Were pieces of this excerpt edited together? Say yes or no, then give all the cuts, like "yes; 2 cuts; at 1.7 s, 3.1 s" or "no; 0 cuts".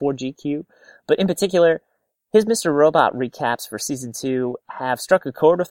no; 0 cuts